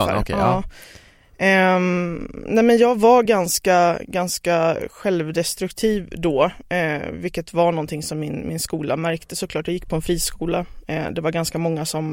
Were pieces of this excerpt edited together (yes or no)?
no